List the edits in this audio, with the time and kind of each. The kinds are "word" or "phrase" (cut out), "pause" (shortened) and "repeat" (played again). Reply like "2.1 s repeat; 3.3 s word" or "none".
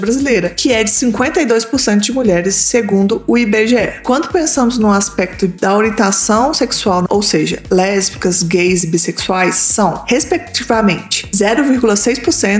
7.1 s word